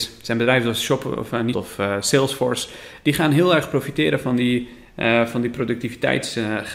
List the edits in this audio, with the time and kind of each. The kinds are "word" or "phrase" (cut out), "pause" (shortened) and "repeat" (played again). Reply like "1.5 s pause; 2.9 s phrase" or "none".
1.5 s phrase

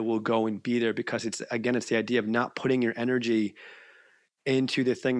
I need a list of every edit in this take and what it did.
none

